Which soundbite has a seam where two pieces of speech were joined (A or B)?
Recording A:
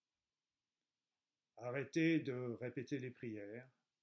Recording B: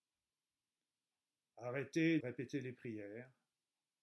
B